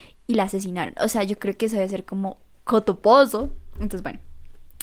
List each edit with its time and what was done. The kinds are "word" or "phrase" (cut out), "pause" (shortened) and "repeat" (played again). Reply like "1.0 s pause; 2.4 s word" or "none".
2.6 s pause

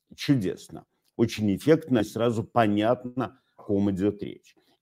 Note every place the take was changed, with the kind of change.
2.0 s word; 3.6 s word

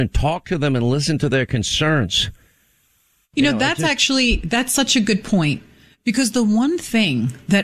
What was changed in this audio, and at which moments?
none

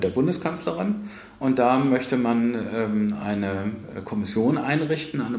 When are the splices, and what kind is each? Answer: none

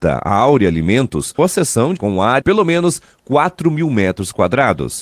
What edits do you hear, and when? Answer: 1.4 s word; 2.0 s word; 2.4 s word

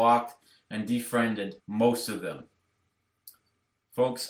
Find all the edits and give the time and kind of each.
1.6 s pause

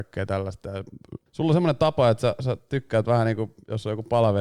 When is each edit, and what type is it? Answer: 1.3 s pause

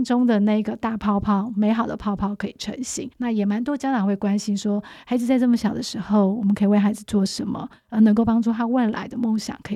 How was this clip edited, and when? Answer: 3.1 s pause

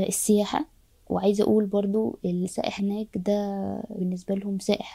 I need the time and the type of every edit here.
2.8 s word; 4.0 s word

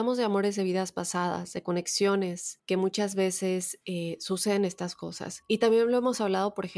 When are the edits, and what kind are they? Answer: none

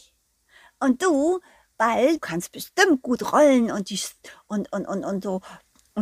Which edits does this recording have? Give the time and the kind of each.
2.2 s word

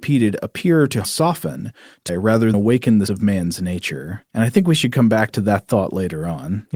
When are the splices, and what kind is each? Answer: 1.0 s phrase; 2.1 s word; 2.5 s word; 3.1 s word

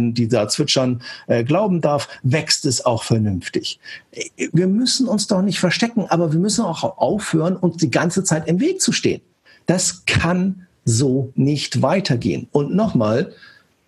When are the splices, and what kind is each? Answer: none

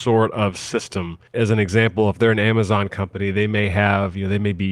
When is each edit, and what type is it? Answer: 1.3 s pause

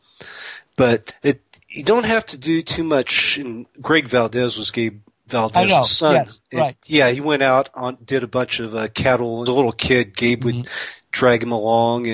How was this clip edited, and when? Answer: 1.1 s word; 9.5 s phrase

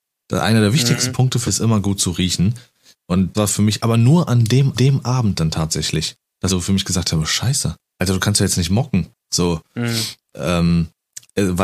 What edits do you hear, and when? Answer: 1.5 s word; 3.3 s word; 4.7 s repeat; 6.5 s word; 7.8 s pause; 9.1 s pause

